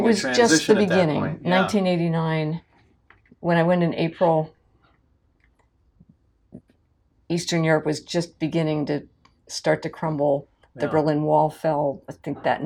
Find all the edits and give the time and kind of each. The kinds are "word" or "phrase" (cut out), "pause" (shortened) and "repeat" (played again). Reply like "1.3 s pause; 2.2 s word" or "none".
none